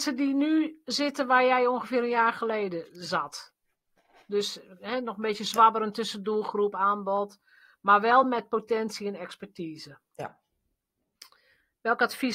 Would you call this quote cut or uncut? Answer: uncut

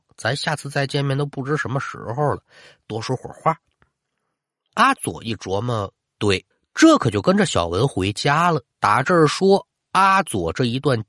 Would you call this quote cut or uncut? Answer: cut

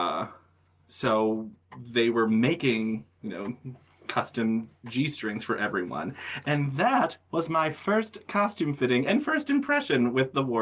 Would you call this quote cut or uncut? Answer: uncut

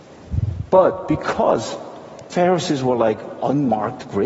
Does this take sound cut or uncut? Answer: uncut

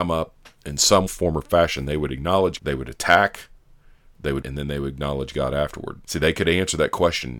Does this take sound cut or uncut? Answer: cut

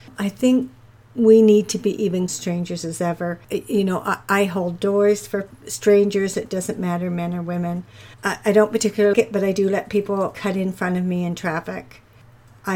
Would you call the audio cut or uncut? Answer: cut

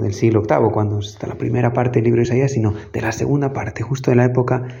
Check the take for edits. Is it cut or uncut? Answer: uncut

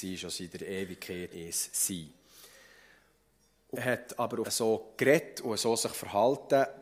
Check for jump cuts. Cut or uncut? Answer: cut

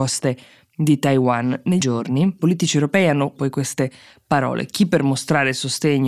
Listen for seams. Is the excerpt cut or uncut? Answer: cut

